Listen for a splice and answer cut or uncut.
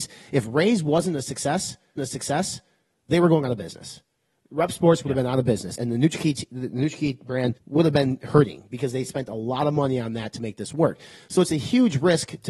cut